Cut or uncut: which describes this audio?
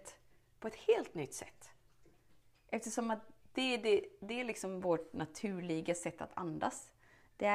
uncut